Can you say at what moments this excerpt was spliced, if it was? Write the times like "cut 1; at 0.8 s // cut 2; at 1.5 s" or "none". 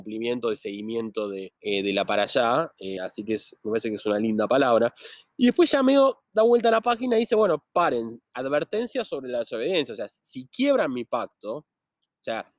cut 1; at 1.6 s // cut 2; at 3.0 s